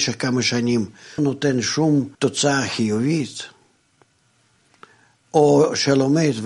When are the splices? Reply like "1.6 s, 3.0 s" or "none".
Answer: 1.2 s, 2.1 s

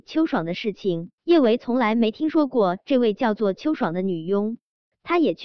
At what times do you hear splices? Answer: 1.2 s

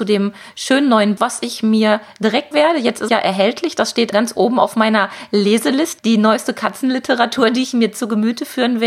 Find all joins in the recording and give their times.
1.2 s, 2.5 s, 3.1 s, 4.1 s, 6.0 s

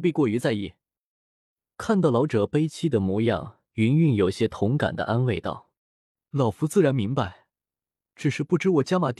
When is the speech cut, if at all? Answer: 5.8 s

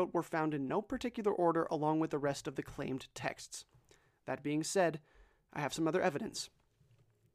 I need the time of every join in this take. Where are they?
none

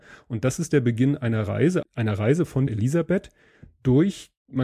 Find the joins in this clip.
1.8 s, 2.7 s

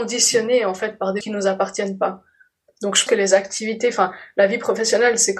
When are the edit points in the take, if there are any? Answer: 1.2 s, 3.1 s

